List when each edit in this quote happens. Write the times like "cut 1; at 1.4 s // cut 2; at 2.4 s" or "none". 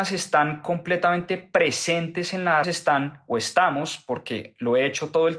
cut 1; at 2.6 s